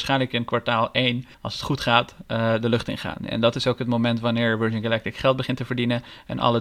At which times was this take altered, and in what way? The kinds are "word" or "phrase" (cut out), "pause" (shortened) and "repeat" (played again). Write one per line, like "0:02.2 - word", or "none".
0:01.3 - pause